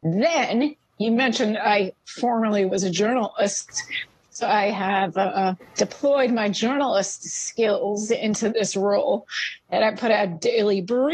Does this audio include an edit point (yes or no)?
no